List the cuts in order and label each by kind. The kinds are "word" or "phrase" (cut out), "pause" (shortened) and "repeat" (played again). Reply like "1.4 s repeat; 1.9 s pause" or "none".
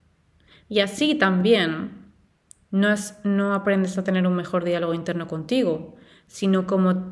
none